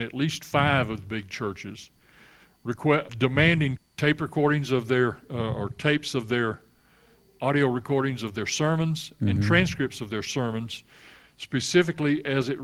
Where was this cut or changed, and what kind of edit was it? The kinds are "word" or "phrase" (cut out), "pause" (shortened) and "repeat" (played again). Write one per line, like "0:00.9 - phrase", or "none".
0:03.1 - word
0:03.8 - word